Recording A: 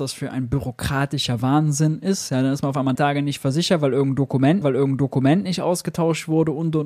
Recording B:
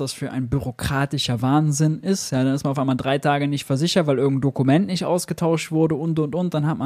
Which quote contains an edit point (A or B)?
A